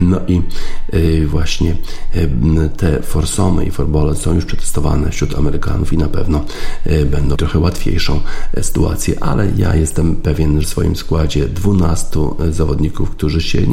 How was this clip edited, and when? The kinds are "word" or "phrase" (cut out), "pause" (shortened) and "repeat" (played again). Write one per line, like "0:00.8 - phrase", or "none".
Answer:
0:07.4 - word
0:10.6 - phrase

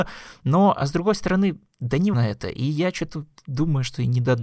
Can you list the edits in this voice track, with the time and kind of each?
0:02.1 - word

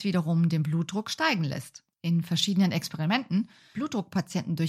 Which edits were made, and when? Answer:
0:01.9 - pause
0:03.7 - word

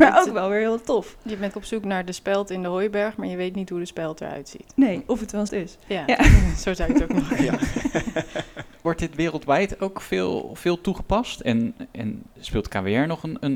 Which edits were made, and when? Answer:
0:01.5 - word
0:05.5 - word

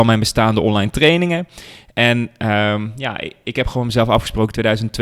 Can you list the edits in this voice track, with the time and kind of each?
none

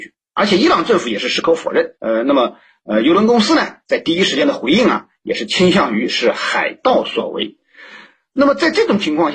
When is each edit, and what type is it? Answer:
0:02.0 - pause

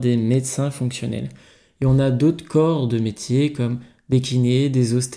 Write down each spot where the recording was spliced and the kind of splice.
none

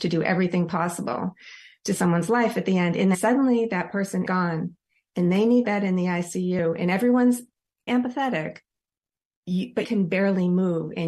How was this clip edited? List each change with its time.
0:02.0 - word
0:03.1 - word
0:04.3 - word
0:05.6 - word
0:07.9 - word
0:09.8 - word

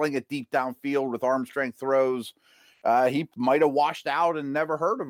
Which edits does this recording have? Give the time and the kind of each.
none

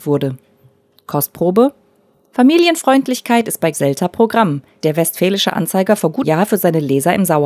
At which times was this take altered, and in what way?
0:03.7 - word
0:04.8 - word
0:06.2 - word

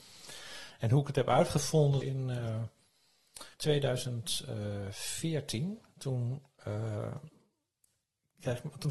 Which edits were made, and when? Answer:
0:02.0 - phrase
0:03.5 - pause

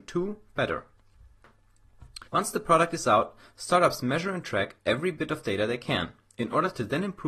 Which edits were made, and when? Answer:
0:02.3 - pause

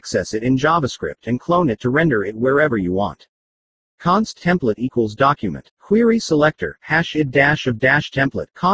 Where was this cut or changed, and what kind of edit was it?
none

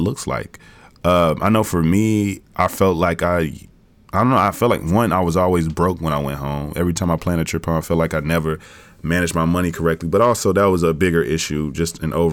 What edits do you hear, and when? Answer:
none

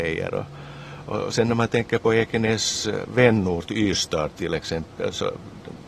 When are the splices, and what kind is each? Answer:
none

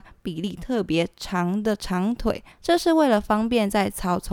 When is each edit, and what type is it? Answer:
0:02.5 - pause

